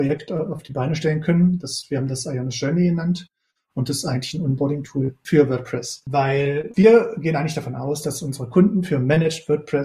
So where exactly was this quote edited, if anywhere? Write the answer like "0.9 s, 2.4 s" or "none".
none